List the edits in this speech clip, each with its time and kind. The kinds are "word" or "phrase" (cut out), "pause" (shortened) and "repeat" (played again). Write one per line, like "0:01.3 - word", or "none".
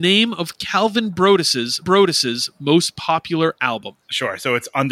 0:01.8 - repeat

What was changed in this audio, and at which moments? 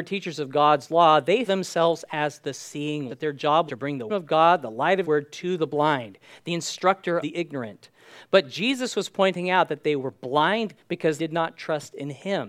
0:01.5 - word
0:03.1 - word
0:03.7 - word
0:04.1 - word
0:05.0 - word
0:07.2 - word
0:10.8 - word
0:11.2 - word

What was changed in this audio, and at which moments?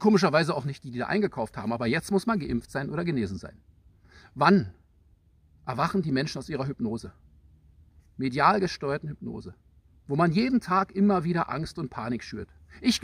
none

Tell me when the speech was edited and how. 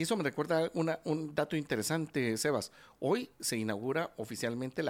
none

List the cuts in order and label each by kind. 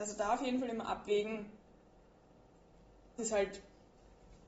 0:03.2 - word

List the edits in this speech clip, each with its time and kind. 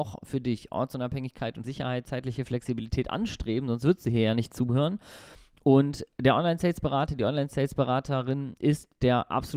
0:01.6 - word

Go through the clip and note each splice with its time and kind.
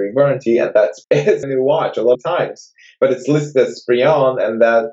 0:01.0 - word
0:01.4 - word
0:02.1 - word

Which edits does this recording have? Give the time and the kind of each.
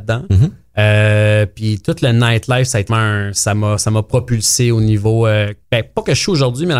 0:02.9 - word
0:05.6 - pause

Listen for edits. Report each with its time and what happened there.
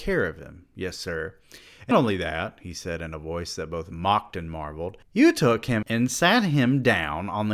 0:01.9 - word
0:05.0 - pause
0:05.8 - word

